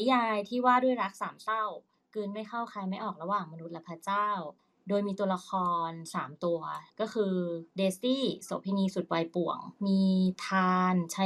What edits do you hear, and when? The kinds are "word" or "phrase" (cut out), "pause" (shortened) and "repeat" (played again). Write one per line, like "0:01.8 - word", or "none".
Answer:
0:01.9 - pause
0:04.6 - pause
0:06.9 - pause
0:07.7 - pause
0:09.8 - pause